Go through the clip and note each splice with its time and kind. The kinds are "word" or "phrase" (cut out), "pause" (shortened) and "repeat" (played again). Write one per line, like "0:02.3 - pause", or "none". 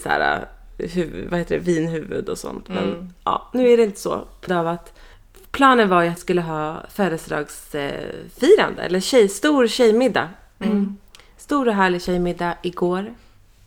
0:04.5 - word
0:06.2 - word